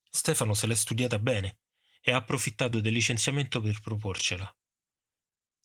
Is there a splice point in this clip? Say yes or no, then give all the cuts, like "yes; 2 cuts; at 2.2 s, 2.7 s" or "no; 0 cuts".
no; 0 cuts